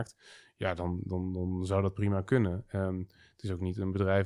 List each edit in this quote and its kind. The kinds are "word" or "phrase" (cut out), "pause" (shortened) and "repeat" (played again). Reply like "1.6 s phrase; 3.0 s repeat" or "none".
none